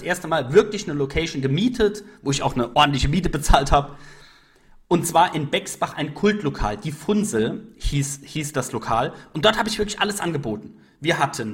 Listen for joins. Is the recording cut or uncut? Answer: uncut